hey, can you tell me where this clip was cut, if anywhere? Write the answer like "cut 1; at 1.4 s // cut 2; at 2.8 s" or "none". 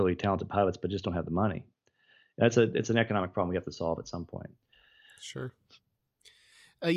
none